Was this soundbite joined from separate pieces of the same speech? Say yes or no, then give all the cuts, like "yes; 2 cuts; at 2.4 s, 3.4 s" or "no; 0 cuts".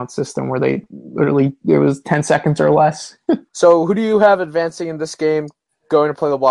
yes; 1 cut; at 3.5 s